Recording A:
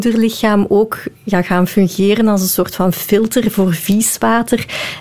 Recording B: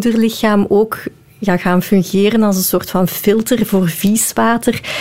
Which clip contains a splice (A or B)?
A